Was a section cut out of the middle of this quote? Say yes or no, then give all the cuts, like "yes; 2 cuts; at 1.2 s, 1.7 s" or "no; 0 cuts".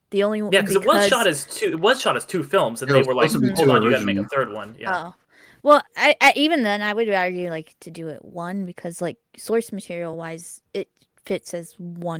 no; 0 cuts